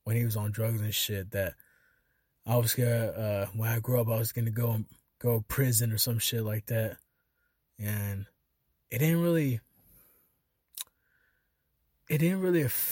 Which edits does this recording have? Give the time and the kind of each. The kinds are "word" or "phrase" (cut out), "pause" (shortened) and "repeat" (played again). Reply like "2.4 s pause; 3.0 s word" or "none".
none